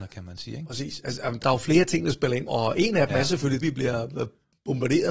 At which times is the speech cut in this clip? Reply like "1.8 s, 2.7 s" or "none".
1.4 s, 2.5 s, 3.6 s